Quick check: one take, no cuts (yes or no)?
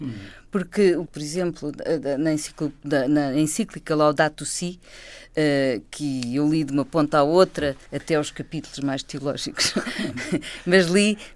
no